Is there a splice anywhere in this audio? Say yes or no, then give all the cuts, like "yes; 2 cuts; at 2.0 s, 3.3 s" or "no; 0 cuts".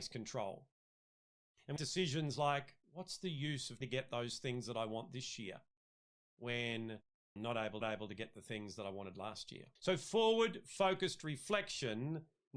yes; 6 cuts; at 1.8 s, 2.8 s, 3.8 s, 7.4 s, 7.8 s, 9.8 s